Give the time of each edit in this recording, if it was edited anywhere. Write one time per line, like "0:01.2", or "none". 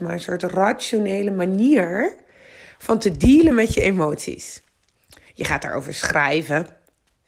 none